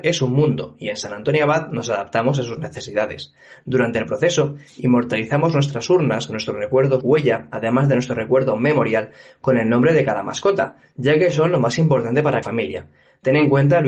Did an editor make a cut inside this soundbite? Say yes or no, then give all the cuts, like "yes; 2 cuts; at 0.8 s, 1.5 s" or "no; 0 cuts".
yes; 2 cuts; at 7.0 s, 12.4 s